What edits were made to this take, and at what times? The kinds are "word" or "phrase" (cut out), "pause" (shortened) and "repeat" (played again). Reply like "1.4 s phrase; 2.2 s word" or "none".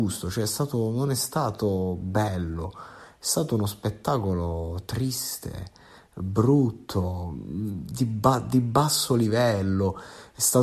none